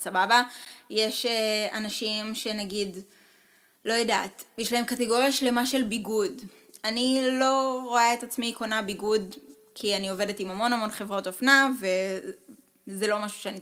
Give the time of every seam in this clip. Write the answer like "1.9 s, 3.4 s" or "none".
none